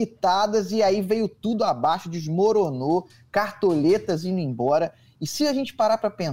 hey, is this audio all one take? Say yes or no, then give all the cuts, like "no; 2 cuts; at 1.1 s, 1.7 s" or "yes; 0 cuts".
yes; 0 cuts